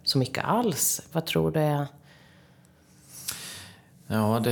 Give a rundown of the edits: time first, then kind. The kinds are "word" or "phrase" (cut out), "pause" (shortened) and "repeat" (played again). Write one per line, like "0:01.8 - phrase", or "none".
none

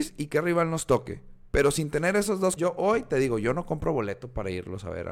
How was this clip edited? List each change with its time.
0:02.6 - word

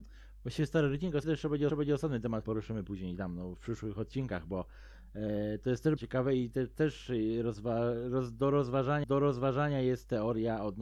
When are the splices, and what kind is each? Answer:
0:01.2 - word
0:01.7 - repeat
0:02.4 - word
0:03.6 - word
0:06.0 - word
0:09.0 - repeat

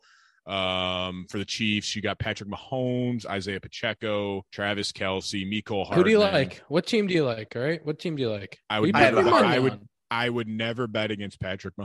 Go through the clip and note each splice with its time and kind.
0:04.5 - pause
0:08.6 - pause

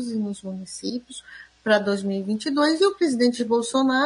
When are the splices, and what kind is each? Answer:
none

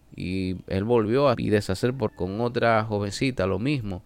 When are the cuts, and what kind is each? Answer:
0:01.3 - word
0:02.1 - word

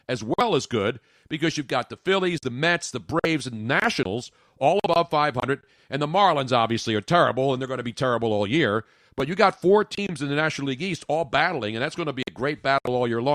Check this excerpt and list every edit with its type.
none

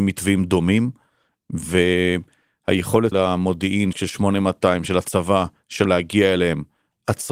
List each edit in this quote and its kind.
0:03.1 - word
0:03.9 - phrase
0:05.8 - word

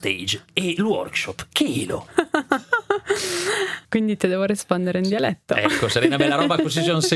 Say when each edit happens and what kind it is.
none

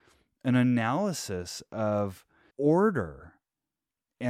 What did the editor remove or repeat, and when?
0:02.5 - word

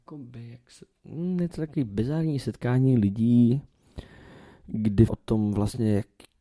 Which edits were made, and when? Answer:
0:05.1 - word

